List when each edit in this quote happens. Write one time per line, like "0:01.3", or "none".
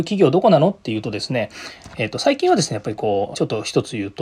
0:03.3